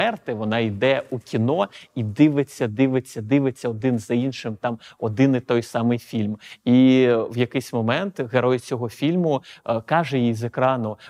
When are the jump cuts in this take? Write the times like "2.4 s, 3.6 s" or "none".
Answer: none